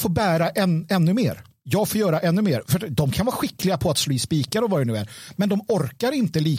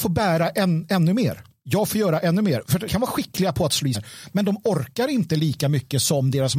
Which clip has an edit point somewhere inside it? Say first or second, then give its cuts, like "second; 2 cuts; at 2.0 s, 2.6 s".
second; 2 cuts; at 2.9 s, 3.9 s